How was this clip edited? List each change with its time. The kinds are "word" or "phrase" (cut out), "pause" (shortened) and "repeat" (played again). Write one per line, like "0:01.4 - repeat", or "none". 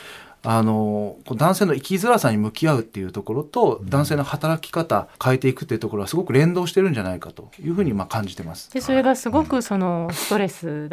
0:05.1 - pause